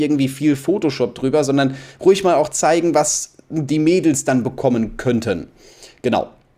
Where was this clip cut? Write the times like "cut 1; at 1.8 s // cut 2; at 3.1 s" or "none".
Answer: none